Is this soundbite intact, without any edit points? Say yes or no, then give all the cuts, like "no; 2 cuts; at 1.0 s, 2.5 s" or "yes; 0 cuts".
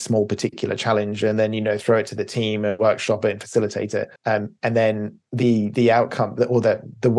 no; 2 cuts; at 4.2 s, 5.3 s